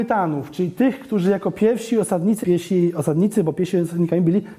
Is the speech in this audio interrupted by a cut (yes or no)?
yes